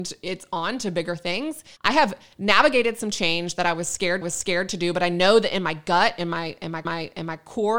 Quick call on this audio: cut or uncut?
cut